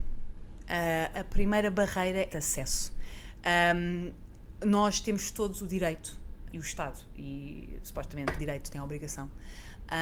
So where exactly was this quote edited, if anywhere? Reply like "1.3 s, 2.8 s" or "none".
1.1 s, 2.3 s, 6.5 s, 8.4 s